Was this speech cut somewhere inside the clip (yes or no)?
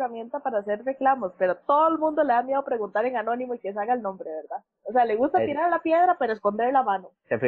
no